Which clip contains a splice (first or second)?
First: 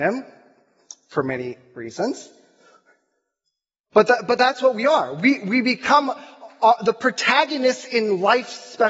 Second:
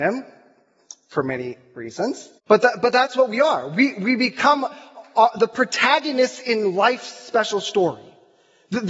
second